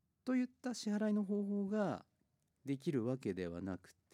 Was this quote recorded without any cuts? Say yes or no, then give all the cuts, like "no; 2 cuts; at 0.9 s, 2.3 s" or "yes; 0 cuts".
yes; 0 cuts